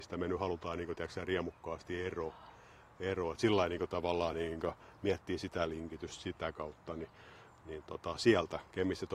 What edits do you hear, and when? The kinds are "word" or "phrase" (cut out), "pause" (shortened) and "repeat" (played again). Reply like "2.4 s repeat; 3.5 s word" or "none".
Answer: none